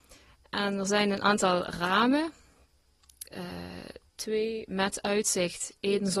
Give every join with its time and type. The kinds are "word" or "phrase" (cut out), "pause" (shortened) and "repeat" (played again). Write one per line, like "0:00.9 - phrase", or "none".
0:04.1 - pause